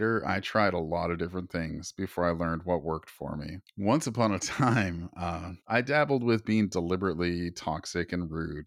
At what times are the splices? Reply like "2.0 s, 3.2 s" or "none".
5.6 s